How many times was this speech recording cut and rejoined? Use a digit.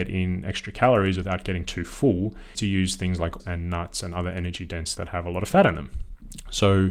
3